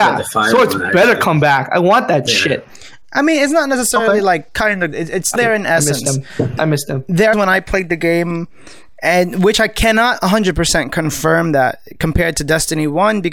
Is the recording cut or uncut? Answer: cut